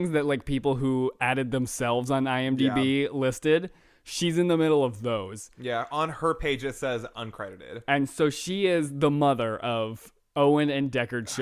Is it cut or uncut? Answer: uncut